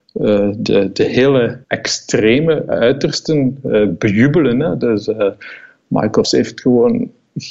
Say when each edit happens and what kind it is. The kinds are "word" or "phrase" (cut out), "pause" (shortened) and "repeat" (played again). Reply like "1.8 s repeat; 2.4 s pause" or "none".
1.6 s pause; 6.2 s word